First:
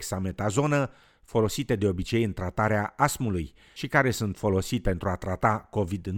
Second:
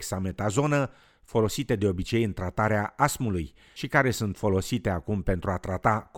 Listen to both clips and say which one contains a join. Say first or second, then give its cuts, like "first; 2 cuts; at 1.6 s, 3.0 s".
first; 1 cut; at 4.8 s